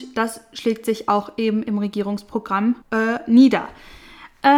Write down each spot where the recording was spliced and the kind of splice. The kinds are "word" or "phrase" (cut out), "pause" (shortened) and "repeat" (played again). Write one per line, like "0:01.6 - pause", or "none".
0:02.8 - pause